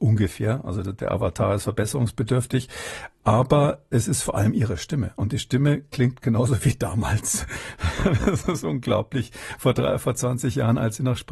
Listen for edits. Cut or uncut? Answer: uncut